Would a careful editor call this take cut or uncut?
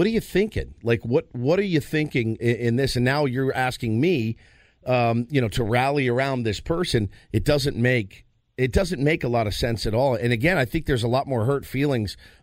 cut